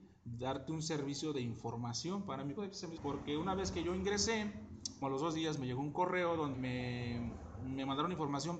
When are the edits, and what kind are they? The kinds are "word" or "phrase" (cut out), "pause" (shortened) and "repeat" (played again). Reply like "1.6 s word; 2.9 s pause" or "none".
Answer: 2.6 s word; 3.0 s phrase; 5.0 s word; 6.5 s word